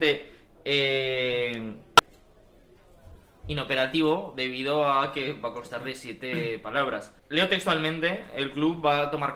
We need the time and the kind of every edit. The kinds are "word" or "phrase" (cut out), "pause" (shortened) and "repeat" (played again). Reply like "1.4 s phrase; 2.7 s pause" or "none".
3.2 s pause; 7.2 s pause